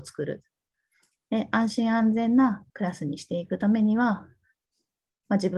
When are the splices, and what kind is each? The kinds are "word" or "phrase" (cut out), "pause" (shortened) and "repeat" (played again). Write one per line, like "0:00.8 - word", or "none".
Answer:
0:02.7 - pause